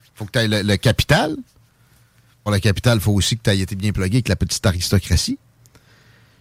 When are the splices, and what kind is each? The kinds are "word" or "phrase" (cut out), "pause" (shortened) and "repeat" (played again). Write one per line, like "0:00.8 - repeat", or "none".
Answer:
0:02.5 - word